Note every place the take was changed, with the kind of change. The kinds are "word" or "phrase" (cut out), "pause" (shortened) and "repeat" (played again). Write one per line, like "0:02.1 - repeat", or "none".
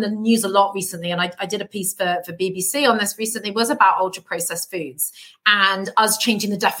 none